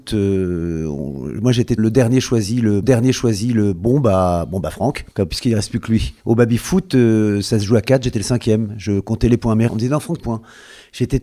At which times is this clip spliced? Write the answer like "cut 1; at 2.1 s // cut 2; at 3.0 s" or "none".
cut 1; at 1.8 s // cut 2; at 2.8 s // cut 3; at 5.1 s // cut 4; at 6.2 s // cut 5; at 9.7 s // cut 6; at 10.2 s